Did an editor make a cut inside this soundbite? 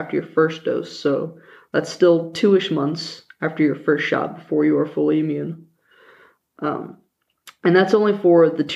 no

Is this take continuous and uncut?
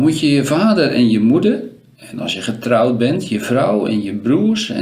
yes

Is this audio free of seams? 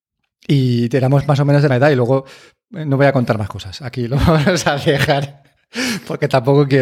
no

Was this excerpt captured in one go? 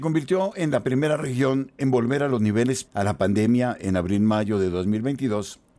no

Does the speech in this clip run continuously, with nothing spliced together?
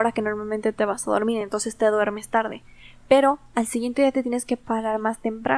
yes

